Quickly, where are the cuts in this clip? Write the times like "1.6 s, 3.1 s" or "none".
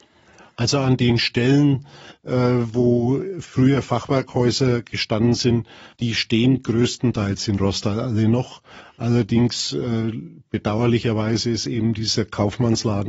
5.9 s